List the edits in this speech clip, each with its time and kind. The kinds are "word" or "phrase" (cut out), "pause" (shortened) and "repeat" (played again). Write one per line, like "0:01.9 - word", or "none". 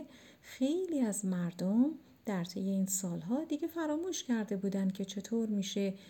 none